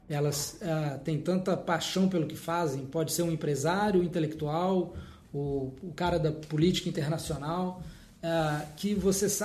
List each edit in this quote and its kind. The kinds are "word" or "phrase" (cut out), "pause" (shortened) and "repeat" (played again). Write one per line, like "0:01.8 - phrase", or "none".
none

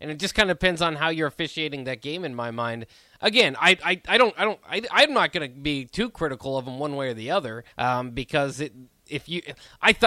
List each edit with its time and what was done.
0:07.7 - pause

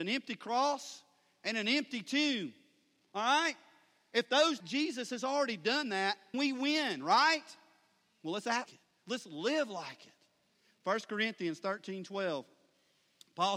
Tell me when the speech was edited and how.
0:04.6 - phrase
0:06.3 - word
0:08.7 - word

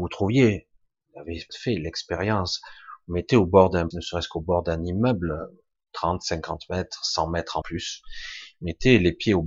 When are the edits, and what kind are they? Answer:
0:01.5 - word
0:03.9 - word
0:07.6 - word

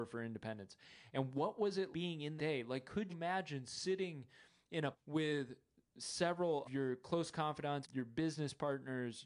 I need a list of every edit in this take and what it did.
0:01.9 - word
0:02.4 - word
0:03.1 - word
0:04.9 - word
0:06.6 - word
0:07.8 - word

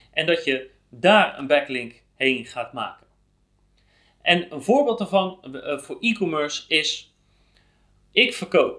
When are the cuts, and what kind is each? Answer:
none

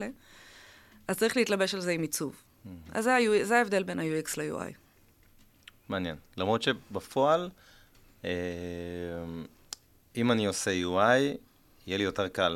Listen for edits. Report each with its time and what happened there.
none

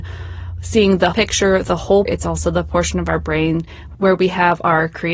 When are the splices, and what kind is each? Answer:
0:01.1 - word
0:02.1 - word

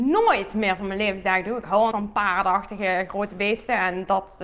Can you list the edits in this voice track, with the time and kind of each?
0:01.9 - word

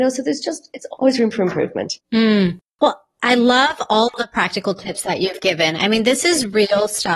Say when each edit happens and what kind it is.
0:02.0 - pause

